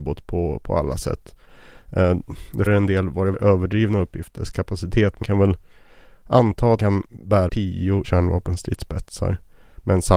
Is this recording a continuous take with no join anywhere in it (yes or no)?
no